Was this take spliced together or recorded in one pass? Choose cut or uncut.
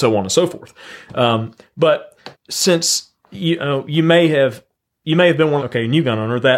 cut